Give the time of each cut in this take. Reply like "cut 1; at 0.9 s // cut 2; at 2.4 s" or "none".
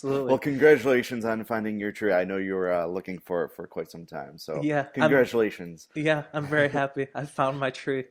none